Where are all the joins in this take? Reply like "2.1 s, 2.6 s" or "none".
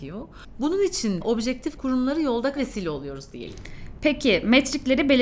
1.2 s, 1.8 s, 2.6 s